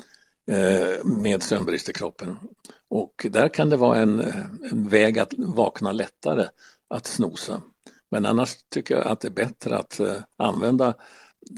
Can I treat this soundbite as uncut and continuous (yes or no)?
yes